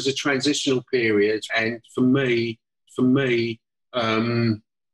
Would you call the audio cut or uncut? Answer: cut